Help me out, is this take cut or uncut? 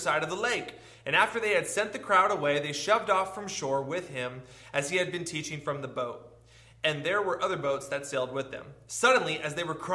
uncut